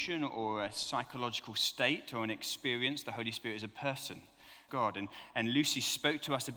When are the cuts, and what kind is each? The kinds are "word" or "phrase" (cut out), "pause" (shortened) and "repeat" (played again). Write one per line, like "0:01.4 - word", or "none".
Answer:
0:04.7 - phrase